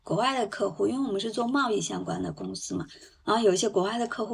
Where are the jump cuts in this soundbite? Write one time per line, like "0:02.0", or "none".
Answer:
none